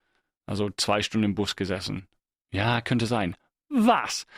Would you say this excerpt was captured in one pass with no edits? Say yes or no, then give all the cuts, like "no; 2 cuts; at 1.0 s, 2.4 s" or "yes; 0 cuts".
yes; 0 cuts